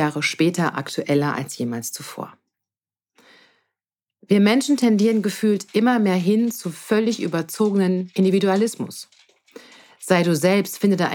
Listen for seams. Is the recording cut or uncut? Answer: uncut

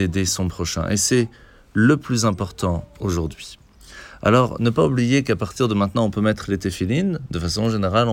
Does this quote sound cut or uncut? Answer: uncut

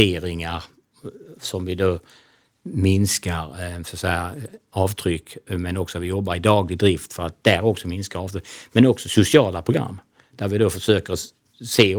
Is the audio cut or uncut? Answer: uncut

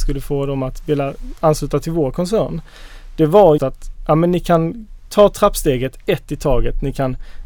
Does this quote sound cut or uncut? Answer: cut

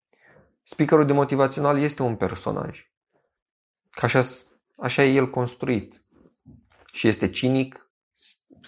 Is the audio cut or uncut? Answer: uncut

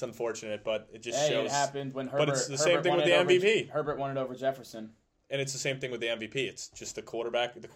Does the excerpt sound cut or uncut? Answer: uncut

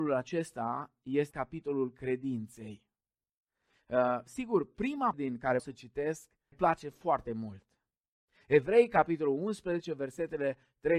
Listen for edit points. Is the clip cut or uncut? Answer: cut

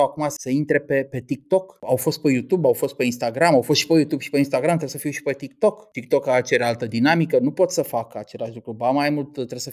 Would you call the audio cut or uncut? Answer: uncut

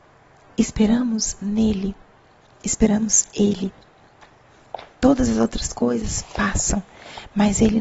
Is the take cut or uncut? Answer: uncut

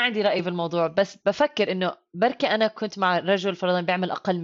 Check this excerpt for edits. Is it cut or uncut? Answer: uncut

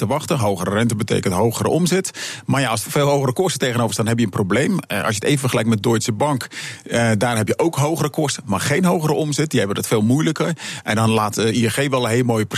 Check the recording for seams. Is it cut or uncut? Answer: cut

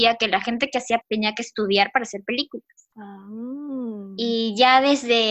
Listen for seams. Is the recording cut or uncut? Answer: cut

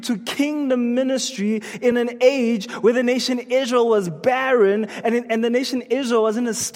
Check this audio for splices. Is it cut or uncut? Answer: uncut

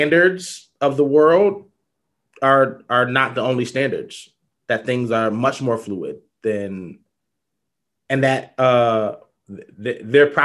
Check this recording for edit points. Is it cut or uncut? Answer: uncut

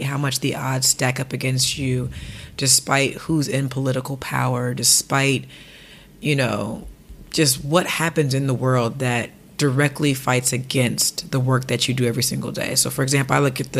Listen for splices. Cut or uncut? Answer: uncut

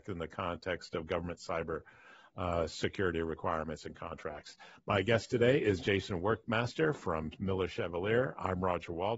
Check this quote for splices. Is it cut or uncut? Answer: uncut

